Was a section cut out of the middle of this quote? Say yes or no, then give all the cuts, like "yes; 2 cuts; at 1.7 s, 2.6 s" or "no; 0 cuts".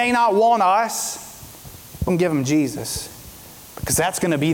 yes; 1 cut; at 2.1 s